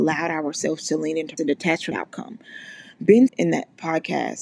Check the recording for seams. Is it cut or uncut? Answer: cut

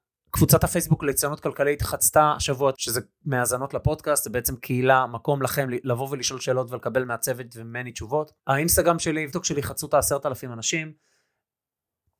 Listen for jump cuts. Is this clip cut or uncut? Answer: cut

